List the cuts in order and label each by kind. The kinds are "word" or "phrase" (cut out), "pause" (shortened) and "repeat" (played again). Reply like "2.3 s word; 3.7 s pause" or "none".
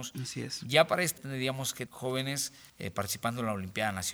1.2 s phrase; 1.9 s word; 2.7 s pause